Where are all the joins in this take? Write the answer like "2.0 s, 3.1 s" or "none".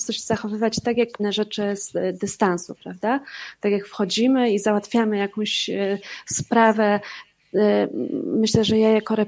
1.2 s